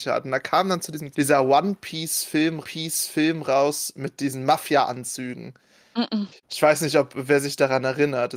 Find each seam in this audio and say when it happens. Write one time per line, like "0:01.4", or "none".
0:01.1
0:02.6
0:06.4